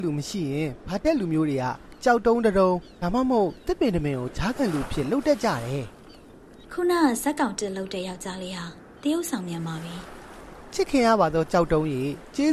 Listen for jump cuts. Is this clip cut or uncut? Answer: cut